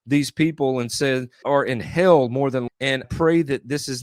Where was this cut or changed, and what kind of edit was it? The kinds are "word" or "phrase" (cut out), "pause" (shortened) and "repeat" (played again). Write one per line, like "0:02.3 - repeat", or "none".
0:01.4 - word
0:02.7 - word
0:03.0 - word